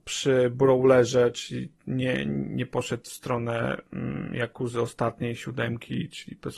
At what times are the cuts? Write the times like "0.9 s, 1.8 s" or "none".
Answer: none